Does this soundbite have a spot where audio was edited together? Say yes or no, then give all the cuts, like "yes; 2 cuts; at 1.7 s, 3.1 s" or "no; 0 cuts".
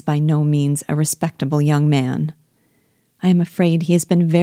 no; 0 cuts